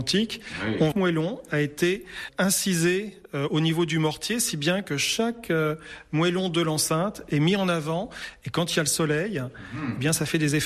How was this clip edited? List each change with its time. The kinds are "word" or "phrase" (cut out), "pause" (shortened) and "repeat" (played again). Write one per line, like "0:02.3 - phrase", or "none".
0:00.9 - phrase